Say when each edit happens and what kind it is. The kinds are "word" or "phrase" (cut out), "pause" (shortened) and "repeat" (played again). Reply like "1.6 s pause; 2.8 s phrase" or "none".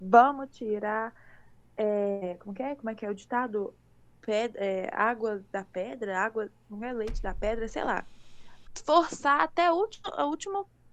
none

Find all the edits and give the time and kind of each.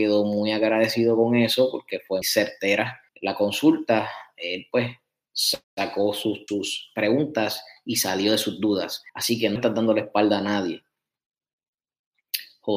2.2 s word; 3.1 s pause; 5.6 s pause; 6.5 s word; 9.1 s pause; 9.6 s word

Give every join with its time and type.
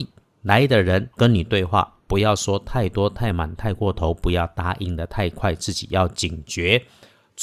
1.1 s pause

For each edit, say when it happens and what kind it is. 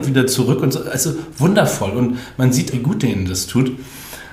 2.7 s word

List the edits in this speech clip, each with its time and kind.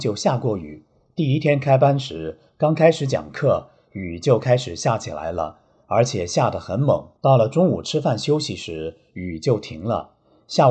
7.2 s pause

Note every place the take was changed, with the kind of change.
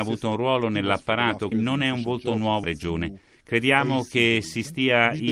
1.5 s word; 2.6 s word

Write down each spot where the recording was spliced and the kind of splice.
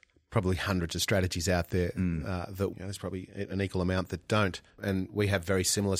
2.7 s phrase; 4.7 s pause

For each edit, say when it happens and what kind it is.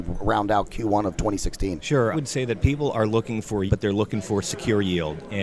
2.1 s word; 3.7 s word

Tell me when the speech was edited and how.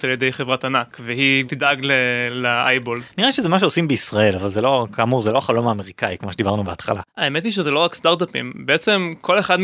1.5 s word; 7.1 s pause

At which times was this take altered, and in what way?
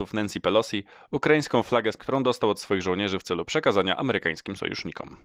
2.0 s word

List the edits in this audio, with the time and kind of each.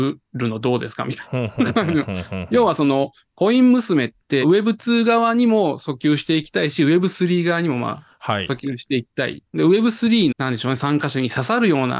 10.3 s word

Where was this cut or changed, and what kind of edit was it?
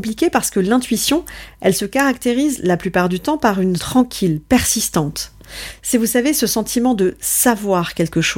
3.8 s phrase

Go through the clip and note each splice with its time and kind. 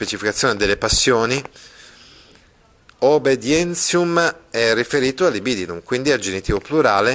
none

